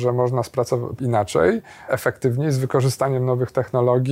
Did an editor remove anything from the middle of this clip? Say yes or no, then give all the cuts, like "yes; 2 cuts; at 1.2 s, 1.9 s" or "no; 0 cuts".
yes; 2 cuts; at 1.0 s, 1.9 s